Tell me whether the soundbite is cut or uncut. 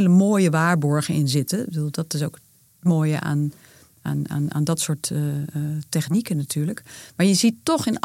uncut